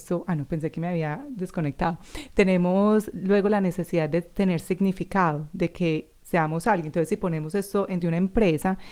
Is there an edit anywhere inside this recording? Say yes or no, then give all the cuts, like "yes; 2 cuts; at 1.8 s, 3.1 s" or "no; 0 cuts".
yes; 1 cut; at 8.0 s